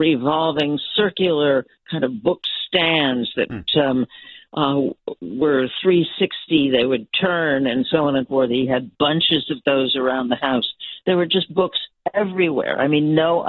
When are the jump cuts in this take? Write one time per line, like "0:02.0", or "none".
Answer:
0:08.3